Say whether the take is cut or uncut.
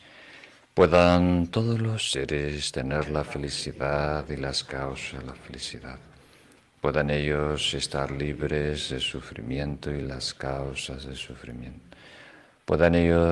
uncut